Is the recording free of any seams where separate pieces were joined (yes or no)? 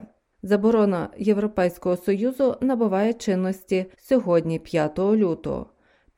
no